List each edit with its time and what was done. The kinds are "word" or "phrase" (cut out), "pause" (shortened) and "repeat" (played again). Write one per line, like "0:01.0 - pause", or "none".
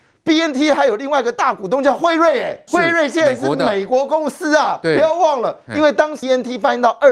0:02.7 - word
0:06.2 - word